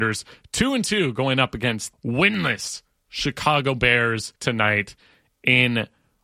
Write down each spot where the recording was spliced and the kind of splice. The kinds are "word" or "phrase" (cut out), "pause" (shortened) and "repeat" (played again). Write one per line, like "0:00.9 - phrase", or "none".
0:01.9 - word
0:04.4 - pause

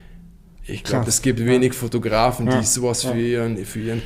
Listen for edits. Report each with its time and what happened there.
none

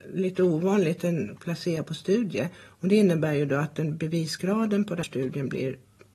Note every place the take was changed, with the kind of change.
0:01.4 - word
0:02.5 - pause
0:05.0 - word

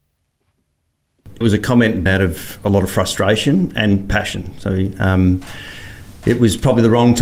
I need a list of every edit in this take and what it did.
0:01.4 - word
0:02.1 - word

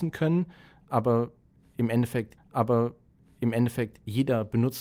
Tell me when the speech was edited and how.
0:02.4 - repeat

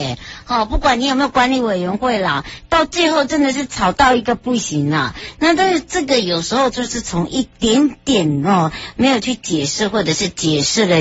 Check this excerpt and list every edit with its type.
none

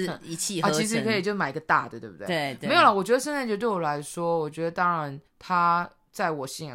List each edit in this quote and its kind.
0:05.3 - pause

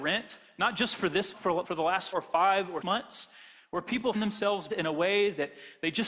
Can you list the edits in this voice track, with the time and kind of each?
0:01.3 - word
0:01.6 - word
0:02.1 - word
0:02.8 - word
0:04.1 - word
0:04.7 - word

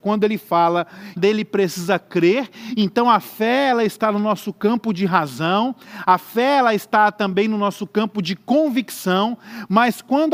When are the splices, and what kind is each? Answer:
0:01.2 - phrase

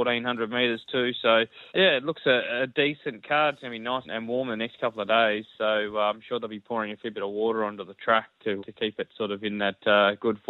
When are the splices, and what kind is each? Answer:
0:01.7 - pause
0:04.0 - word
0:08.6 - word

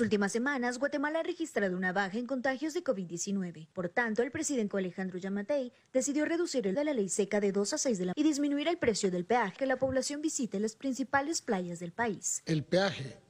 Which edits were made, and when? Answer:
0:04.7 - word
0:06.7 - word
0:08.1 - word
0:09.6 - word

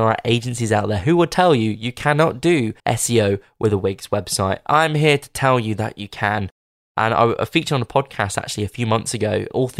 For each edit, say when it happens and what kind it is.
0:02.8 - pause

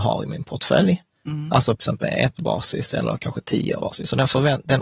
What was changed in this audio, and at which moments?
0:01.8 - word
0:02.4 - word
0:03.8 - word

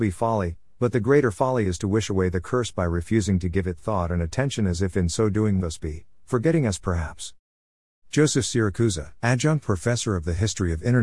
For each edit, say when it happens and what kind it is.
0:05.6 - phrase
0:09.2 - pause

